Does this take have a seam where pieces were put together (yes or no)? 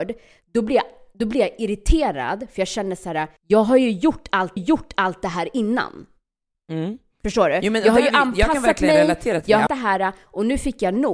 yes